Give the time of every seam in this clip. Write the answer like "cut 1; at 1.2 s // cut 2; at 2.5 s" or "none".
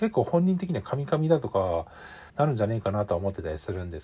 cut 1; at 2.3 s